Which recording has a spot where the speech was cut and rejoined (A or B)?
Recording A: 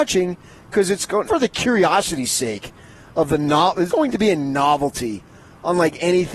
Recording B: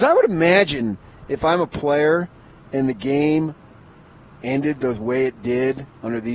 A